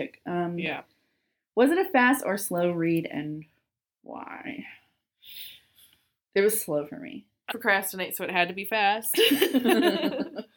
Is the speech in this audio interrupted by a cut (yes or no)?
yes